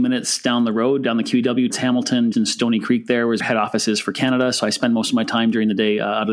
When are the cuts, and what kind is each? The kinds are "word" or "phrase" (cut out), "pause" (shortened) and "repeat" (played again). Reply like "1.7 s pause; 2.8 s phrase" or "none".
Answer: 1.7 s word; 2.3 s word; 3.4 s phrase